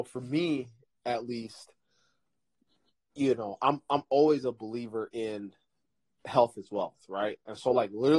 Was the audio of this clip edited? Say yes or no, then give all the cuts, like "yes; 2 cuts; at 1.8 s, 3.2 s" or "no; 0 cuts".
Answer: no; 0 cuts